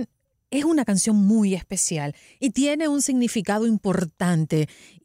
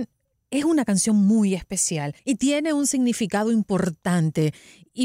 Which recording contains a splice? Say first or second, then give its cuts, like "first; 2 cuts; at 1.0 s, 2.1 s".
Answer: second; 1 cut; at 2.2 s